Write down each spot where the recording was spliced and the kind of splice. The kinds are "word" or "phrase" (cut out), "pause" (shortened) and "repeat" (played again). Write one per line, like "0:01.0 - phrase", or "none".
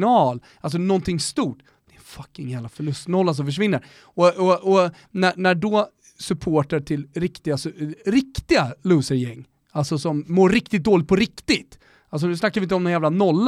none